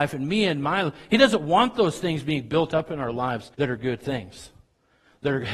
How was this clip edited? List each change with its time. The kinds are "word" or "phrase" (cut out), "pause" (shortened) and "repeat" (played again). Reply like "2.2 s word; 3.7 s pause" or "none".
3.5 s pause

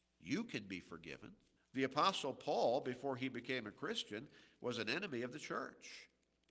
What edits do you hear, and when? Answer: 1.6 s pause

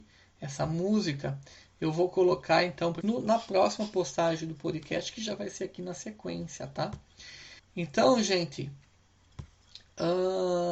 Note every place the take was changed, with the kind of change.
3.0 s word; 7.6 s pause

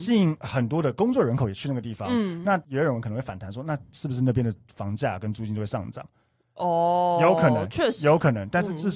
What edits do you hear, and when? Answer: none

